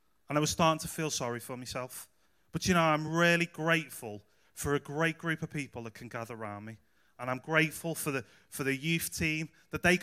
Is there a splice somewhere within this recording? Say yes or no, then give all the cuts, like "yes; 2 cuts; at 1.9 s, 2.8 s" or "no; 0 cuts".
no; 0 cuts